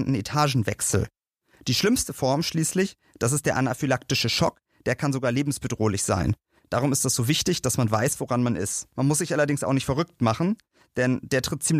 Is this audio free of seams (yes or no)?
yes